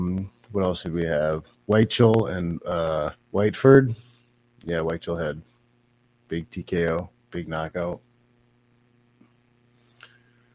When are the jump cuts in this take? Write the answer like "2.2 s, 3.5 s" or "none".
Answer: 1.5 s, 3.2 s